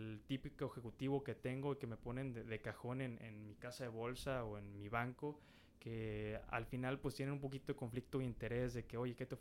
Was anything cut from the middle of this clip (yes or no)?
no